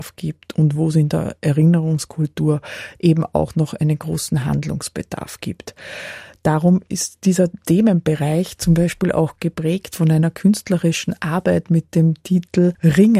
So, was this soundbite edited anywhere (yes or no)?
no